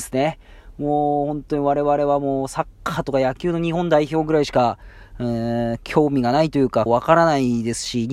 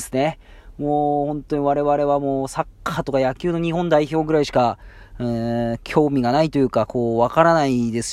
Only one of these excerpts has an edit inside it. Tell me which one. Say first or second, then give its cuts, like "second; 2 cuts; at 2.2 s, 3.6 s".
first; 1 cut; at 6.9 s